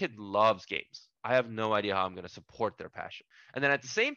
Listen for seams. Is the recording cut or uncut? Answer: cut